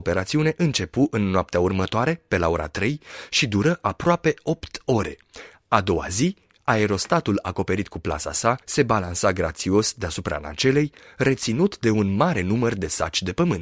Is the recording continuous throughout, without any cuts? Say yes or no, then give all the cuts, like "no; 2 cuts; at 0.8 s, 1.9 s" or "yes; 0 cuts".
no; 1 cut; at 8.6 s